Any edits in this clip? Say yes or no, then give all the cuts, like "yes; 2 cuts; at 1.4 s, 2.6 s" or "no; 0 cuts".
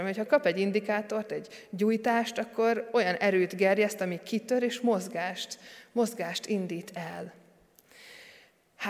no; 0 cuts